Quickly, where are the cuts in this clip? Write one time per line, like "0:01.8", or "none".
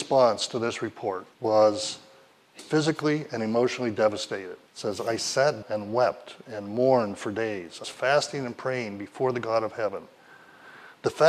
0:01.3
0:02.6
0:04.7
0:05.6
0:07.8